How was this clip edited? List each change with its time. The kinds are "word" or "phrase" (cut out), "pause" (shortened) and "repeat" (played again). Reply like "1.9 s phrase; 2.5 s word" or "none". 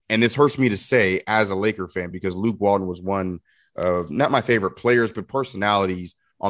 none

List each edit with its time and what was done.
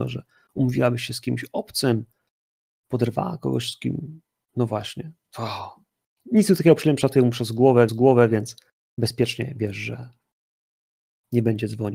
7.9 s repeat

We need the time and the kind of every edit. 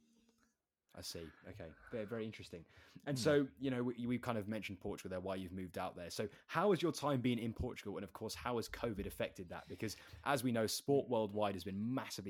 none

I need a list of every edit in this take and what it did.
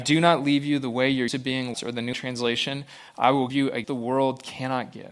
1.3 s word; 1.7 s word; 2.1 s word; 3.5 s word; 3.8 s word

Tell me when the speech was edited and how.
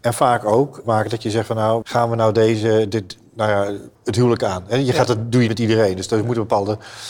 1.8 s word; 4.0 s pause; 5.5 s word

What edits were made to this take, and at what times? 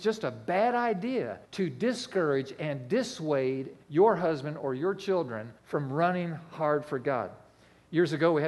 1.4 s pause; 3.8 s pause; 5.6 s pause

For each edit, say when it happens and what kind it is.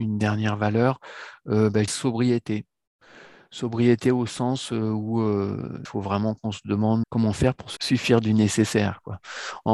1.9 s word; 5.8 s word; 7.0 s word; 7.8 s word

